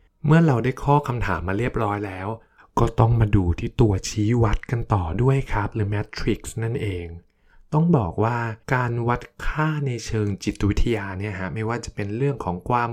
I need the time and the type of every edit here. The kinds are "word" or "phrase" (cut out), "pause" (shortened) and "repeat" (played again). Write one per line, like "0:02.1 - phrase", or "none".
0:08.6 - pause